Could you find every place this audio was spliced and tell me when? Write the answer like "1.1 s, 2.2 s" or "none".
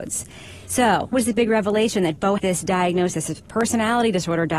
1.1 s, 2.4 s